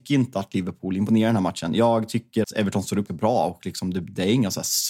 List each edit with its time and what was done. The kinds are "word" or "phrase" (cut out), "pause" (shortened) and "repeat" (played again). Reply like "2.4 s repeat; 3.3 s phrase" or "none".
2.4 s word; 3.1 s word

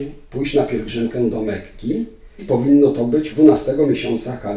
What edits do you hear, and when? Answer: 2.4 s word; 3.3 s word

